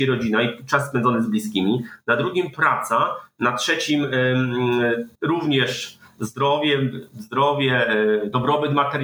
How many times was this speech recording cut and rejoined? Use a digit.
1